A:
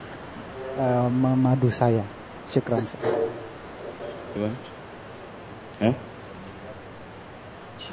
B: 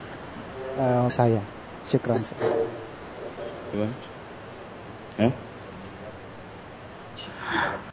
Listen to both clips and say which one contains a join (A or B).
B